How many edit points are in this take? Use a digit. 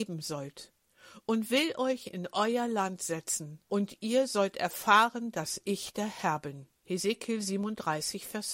2